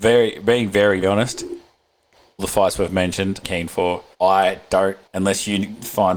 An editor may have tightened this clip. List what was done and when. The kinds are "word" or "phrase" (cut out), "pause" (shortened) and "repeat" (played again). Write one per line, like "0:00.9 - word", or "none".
0:01.0 - word
0:02.4 - word
0:03.4 - phrase
0:04.1 - pause
0:05.1 - pause